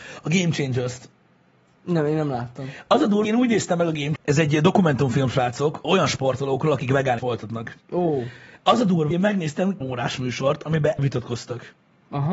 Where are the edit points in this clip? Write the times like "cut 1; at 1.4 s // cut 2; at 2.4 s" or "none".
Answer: cut 1; at 3.2 s // cut 2; at 4.2 s // cut 3; at 5.8 s // cut 4; at 7.2 s // cut 5; at 9.1 s // cut 6; at 9.8 s // cut 7; at 11.0 s